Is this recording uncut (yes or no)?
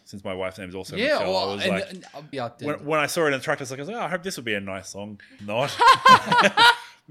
no